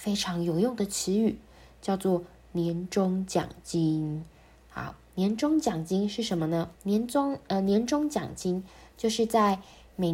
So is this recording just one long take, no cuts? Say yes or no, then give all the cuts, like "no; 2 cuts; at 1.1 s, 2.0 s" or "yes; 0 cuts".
no; 1 cut; at 6.7 s